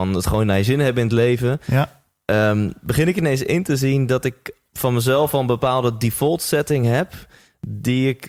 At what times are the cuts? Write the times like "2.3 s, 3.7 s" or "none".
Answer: none